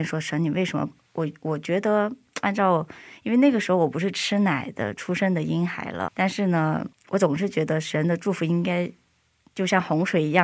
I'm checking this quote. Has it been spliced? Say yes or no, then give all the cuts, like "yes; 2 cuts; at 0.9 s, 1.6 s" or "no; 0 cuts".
yes; 2 cuts; at 6.1 s, 6.9 s